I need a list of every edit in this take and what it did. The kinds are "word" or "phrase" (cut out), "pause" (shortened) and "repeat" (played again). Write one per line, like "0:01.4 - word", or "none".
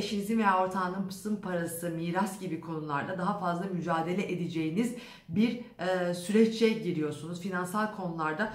none